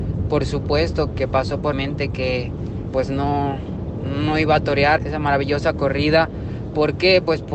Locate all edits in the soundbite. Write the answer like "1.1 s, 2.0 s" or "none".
1.1 s, 1.7 s, 2.9 s, 5.0 s

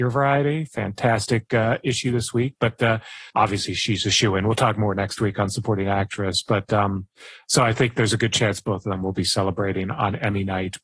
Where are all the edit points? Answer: 3.3 s

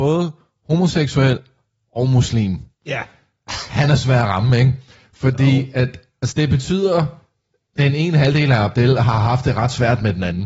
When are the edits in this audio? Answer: 2.7 s

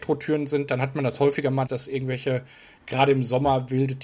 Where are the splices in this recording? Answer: 1.7 s

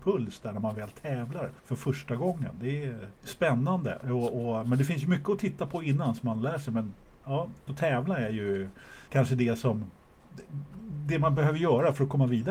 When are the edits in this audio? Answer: 1.6 s, 3.1 s, 7.7 s, 9.1 s

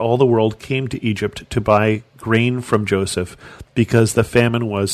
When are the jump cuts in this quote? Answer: none

